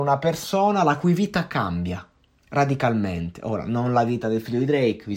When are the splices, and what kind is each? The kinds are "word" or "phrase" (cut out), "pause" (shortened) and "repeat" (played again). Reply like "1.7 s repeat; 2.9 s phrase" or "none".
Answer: none